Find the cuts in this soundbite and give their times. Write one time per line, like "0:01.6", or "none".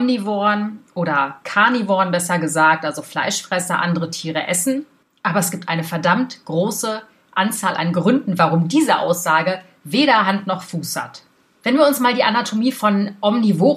none